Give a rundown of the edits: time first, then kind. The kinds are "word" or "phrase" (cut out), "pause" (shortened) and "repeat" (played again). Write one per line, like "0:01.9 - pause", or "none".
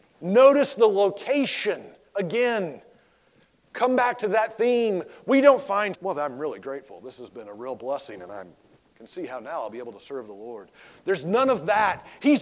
0:05.9 - word